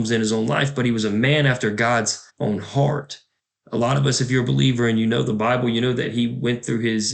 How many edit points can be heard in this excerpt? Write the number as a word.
two